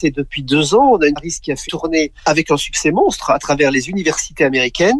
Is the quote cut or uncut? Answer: cut